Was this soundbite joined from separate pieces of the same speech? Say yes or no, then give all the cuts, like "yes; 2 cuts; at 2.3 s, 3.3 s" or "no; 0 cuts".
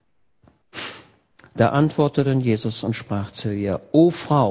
no; 0 cuts